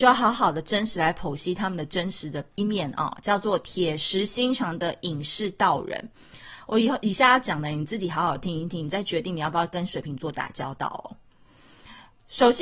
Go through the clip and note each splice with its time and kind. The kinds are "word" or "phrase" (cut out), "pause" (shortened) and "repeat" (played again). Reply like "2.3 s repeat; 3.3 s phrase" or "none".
2.6 s word

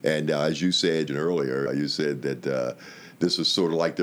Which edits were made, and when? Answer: 1.1 s phrase; 1.7 s word

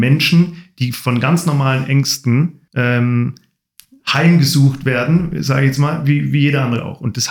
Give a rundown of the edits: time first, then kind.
2.7 s pause

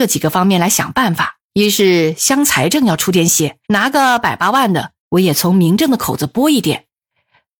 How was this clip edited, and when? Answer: 1.4 s pause; 3.6 s pause; 5.0 s pause

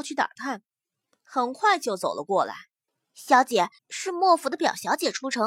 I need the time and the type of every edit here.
2.9 s pause; 3.8 s pause

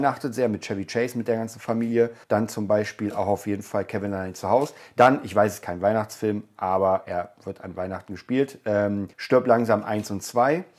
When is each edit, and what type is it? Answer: 2.2 s pause; 9.1 s pause

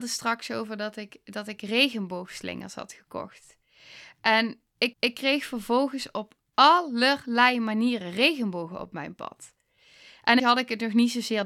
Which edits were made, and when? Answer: 4.9 s repeat; 10.4 s phrase

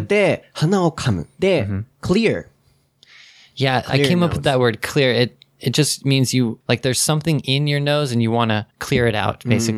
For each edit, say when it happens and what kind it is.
1.3 s pause; 1.9 s pause; 6.6 s pause; 8.7 s pause

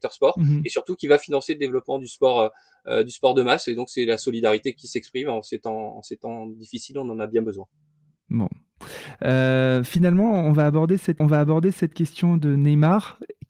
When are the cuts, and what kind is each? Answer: 11.2 s repeat

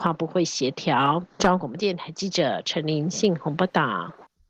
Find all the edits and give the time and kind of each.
1.3 s pause

